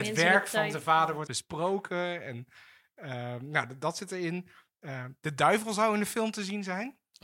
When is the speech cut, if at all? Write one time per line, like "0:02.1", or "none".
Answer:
0:01.3